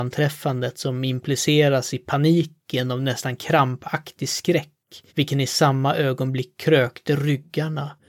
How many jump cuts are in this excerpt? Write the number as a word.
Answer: one